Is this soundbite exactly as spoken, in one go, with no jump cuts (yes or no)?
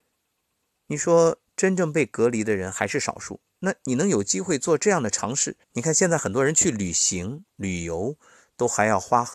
no